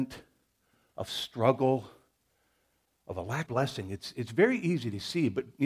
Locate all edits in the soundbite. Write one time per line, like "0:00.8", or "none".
0:03.5